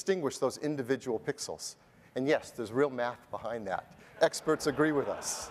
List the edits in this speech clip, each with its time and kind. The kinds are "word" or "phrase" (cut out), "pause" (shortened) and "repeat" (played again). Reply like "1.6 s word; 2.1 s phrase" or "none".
none